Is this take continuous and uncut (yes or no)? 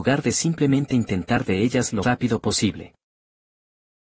no